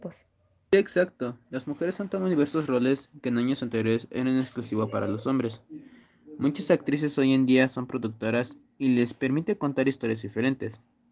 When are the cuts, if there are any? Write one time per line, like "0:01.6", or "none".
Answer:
none